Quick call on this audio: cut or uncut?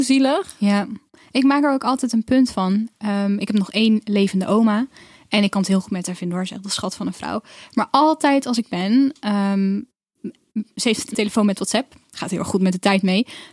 cut